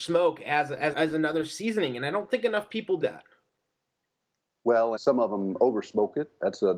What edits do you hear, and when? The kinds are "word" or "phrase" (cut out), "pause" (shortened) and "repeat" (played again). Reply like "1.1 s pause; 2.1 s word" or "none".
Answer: 0.9 s word; 3.0 s word; 5.0 s word